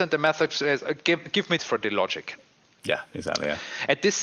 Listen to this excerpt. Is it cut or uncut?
cut